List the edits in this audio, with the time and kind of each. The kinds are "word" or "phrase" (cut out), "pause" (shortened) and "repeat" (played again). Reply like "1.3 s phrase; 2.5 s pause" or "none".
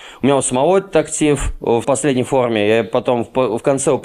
1.8 s phrase